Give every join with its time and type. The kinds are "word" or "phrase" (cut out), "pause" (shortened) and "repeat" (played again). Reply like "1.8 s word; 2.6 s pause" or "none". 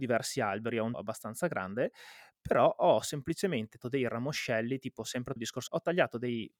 0.9 s word; 3.8 s word; 5.4 s word; 5.7 s phrase